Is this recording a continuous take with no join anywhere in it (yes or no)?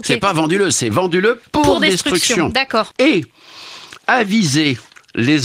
no